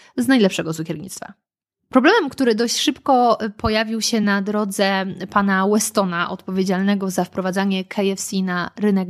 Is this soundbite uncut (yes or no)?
yes